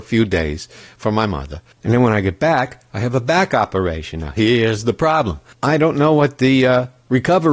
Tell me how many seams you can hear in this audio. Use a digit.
2